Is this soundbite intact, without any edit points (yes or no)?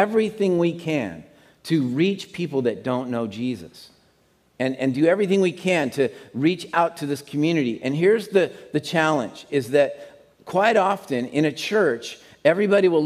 yes